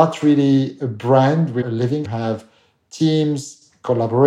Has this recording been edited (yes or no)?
yes